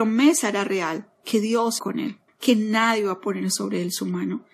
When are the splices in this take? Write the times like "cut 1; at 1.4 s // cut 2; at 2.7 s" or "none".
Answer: cut 1; at 1.1 s // cut 2; at 1.8 s // cut 3; at 2.3 s